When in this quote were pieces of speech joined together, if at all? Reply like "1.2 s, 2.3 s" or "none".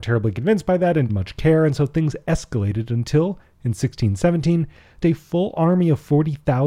1.1 s, 5.0 s